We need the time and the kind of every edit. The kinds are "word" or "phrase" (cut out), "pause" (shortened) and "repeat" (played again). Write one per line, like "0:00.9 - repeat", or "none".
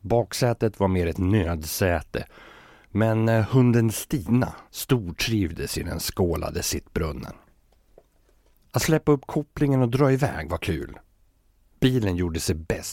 0:04.7 - pause